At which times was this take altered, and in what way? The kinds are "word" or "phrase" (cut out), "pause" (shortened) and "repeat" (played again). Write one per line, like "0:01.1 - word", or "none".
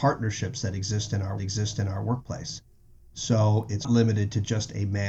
0:01.4 - repeat
0:03.8 - word